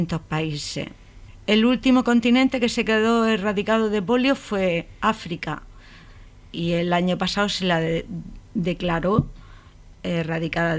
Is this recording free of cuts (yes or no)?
yes